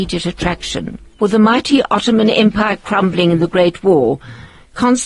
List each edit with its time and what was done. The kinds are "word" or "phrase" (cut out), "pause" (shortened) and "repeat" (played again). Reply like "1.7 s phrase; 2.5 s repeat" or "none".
1.1 s pause